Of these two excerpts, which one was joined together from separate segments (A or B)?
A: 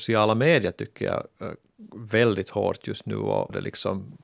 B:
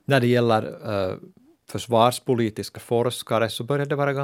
B